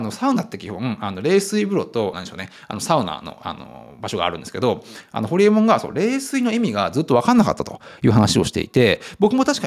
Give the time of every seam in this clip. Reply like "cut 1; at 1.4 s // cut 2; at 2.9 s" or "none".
cut 1; at 2.1 s